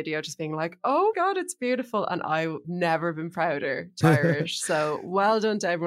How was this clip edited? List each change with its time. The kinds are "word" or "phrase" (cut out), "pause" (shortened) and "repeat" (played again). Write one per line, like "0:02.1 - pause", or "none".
0:01.1 - word
0:02.6 - word
0:04.0 - word